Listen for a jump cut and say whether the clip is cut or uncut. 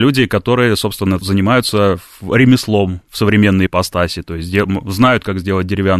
cut